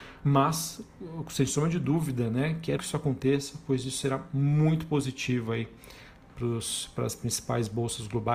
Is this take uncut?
no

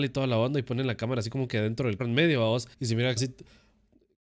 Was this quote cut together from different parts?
yes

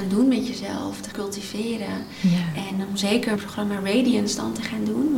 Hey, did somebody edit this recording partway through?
yes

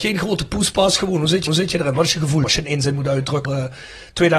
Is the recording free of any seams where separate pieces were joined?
no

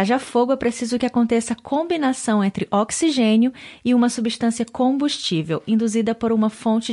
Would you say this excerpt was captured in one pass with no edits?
yes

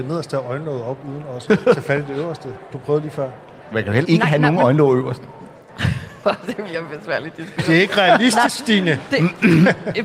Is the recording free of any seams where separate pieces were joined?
no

